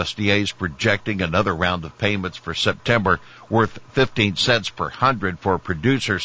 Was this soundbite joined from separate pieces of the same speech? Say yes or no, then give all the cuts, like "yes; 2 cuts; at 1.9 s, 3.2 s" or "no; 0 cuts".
no; 0 cuts